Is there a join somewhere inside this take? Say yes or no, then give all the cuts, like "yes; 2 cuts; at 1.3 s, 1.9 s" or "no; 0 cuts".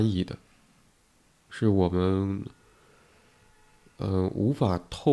no; 0 cuts